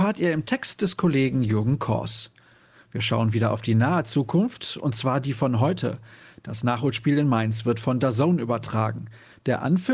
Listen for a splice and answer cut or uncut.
uncut